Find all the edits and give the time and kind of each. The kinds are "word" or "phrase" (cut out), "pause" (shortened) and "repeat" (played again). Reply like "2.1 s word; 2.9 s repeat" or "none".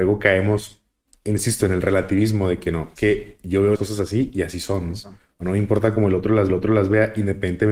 3.0 s word; 3.7 s word; 6.5 s repeat